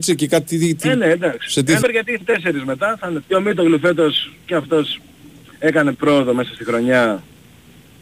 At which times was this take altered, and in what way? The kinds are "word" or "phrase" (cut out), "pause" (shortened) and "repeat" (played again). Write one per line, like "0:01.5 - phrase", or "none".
0:01.8 - word
0:02.2 - word
0:03.2 - word
0:05.9 - word